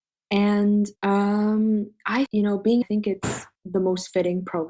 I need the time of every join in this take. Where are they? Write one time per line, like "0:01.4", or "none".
0:01.0
0:02.3
0:02.8
0:03.6